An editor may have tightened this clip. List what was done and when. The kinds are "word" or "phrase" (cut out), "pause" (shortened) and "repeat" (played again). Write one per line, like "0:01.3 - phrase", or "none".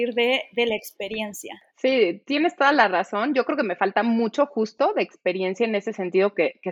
0:01.7 - pause